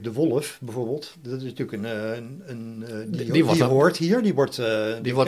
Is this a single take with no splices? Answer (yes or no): yes